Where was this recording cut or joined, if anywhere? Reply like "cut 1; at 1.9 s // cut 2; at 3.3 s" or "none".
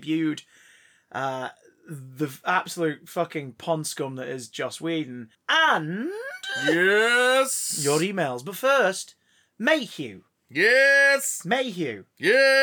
cut 1; at 5.3 s